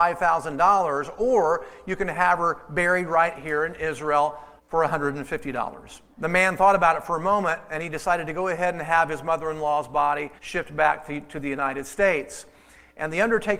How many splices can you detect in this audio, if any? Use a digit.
3